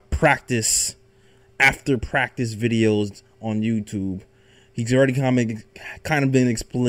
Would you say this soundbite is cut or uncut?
uncut